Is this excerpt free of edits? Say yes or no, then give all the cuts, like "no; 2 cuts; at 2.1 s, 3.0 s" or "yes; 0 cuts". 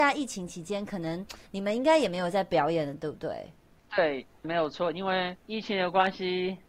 no; 2 cuts; at 4.4 s, 5.4 s